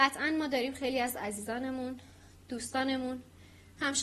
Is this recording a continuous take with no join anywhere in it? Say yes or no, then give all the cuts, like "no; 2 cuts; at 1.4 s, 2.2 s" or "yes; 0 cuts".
yes; 0 cuts